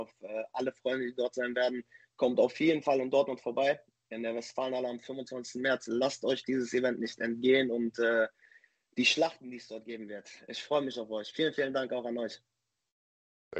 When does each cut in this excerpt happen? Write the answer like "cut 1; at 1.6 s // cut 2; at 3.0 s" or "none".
none